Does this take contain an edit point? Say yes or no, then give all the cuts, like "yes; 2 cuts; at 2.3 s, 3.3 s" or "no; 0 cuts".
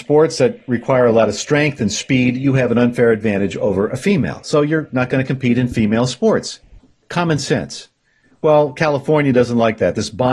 no; 0 cuts